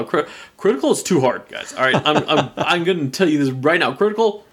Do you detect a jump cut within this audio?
no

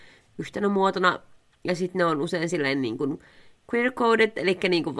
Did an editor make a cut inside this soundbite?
no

